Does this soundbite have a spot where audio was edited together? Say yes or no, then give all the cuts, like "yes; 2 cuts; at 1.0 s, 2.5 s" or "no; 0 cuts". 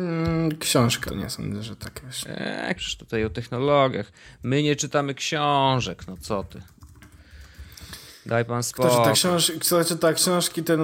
yes; 2 cuts; at 1.1 s, 2.8 s